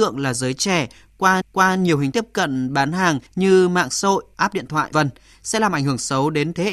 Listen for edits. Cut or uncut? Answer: cut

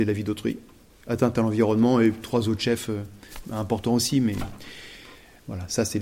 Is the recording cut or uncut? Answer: uncut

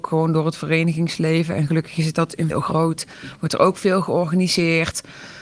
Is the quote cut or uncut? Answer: cut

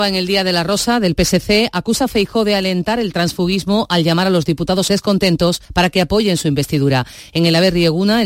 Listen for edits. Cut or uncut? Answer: cut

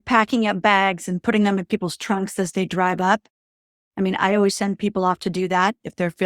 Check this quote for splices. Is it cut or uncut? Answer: uncut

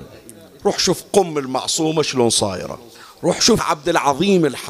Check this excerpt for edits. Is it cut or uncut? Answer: cut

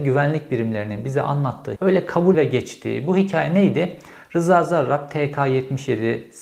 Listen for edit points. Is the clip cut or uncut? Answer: cut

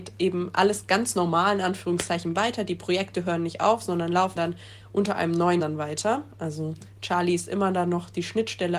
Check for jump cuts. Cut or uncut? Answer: cut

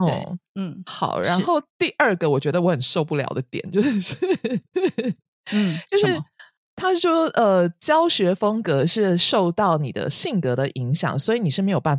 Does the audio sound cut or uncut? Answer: cut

